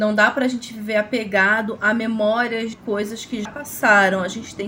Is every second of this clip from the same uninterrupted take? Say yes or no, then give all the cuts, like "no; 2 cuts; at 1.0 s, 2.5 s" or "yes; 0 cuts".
no; 2 cuts; at 2.7 s, 3.5 s